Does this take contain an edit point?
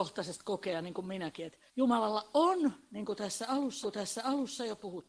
yes; 2 cuts; at 1.7 s, 3.8 s

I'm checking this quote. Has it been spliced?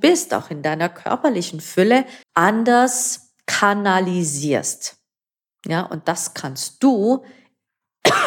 yes; 1 cut; at 2.2 s

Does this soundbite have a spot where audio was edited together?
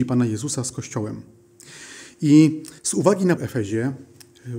yes; 2 cuts; at 2.8 s, 3.4 s

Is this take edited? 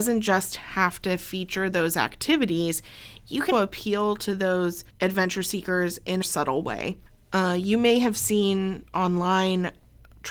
yes; 4 cuts; at 3.5 s, 4.9 s, 6.2 s, 7.1 s

